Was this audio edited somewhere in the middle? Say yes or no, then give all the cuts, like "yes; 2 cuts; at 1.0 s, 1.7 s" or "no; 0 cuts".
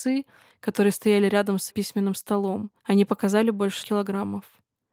yes; 3 cuts; at 1.7 s, 2.8 s, 3.8 s